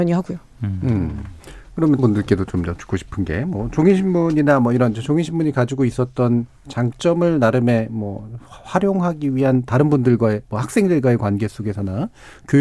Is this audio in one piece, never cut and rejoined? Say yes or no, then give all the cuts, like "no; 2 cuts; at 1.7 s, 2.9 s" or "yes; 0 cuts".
no; 1 cut; at 2.0 s